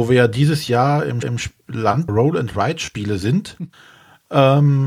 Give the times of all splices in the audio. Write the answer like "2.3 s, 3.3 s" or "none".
1.2 s, 2.1 s, 3.7 s